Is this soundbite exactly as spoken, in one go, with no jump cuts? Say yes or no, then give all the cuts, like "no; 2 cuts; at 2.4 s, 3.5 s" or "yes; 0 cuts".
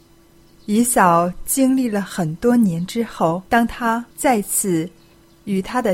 no; 2 cuts; at 3.5 s, 4.1 s